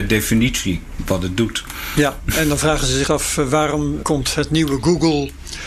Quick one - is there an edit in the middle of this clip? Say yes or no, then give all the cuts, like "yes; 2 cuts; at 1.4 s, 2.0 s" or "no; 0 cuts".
yes; 2 cuts; at 3.1 s, 4.0 s